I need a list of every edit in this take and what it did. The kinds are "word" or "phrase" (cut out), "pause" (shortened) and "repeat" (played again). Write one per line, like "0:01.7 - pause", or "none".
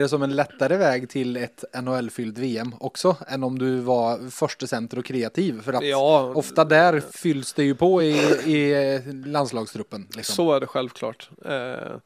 none